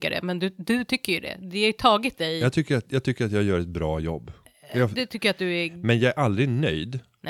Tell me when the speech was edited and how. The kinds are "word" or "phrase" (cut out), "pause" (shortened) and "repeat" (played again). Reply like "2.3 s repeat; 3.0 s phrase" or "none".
none